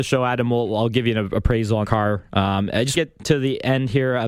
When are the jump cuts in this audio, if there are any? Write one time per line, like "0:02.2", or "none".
0:01.8
0:02.9

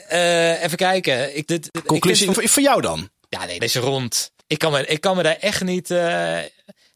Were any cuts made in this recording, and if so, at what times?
0:01.5
0:02.3
0:03.6
0:04.4

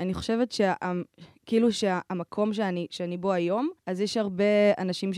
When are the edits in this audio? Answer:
0:03.8

